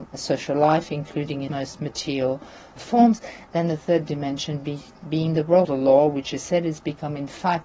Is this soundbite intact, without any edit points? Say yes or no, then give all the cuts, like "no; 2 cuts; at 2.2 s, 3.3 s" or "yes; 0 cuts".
no; 3 cuts; at 1.5 s, 2.8 s, 5.6 s